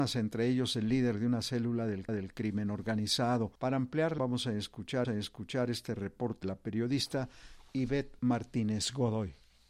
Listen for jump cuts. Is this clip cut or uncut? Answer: cut